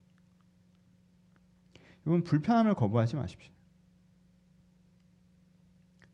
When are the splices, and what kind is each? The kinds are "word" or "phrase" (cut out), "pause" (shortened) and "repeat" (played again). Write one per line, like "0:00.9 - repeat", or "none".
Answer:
none